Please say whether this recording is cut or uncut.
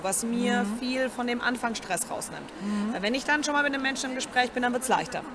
uncut